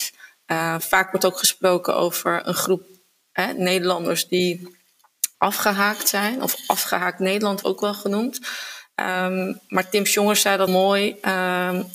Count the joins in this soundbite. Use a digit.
3